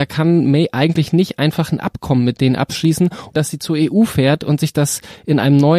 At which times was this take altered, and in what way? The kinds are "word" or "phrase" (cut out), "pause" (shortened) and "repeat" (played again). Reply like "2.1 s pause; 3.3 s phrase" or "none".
3.3 s word